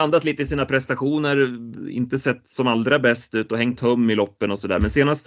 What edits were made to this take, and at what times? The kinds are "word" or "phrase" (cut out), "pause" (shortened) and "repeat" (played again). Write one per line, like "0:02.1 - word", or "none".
0:03.8 - word